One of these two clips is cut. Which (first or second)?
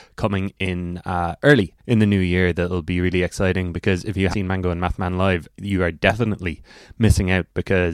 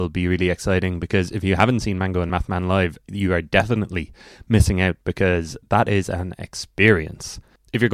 first